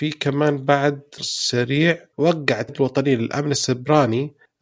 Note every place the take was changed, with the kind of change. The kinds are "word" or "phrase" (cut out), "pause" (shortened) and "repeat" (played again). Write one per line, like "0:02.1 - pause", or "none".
0:01.2 - word
0:02.1 - word
0:02.7 - word